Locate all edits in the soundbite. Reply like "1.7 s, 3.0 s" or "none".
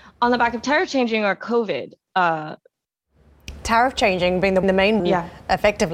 4.6 s, 5.0 s